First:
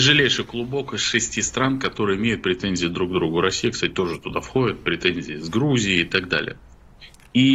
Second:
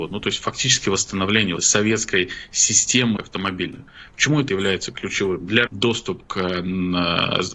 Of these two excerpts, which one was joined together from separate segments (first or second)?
second